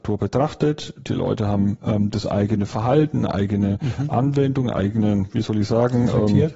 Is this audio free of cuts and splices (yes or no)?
yes